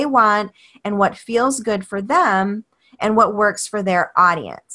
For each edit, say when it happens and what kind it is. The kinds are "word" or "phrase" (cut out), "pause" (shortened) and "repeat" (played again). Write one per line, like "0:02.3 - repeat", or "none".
none